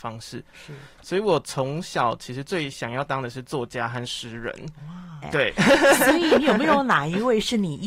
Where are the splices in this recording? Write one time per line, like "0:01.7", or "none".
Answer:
0:05.2